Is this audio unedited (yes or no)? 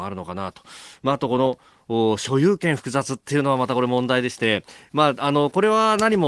yes